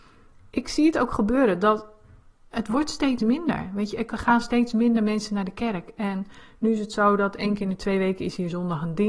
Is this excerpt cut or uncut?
uncut